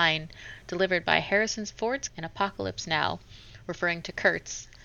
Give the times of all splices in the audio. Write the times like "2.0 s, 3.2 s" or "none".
2.1 s